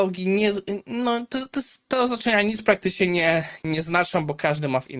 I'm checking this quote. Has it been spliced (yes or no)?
no